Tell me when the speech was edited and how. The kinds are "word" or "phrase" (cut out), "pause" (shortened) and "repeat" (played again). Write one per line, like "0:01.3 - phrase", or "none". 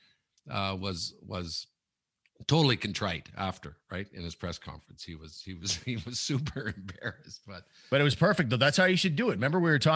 none